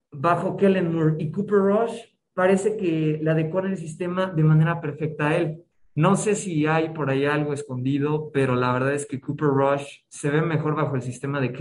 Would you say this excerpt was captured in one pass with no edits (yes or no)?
yes